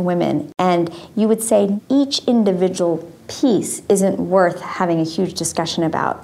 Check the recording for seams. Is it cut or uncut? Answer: uncut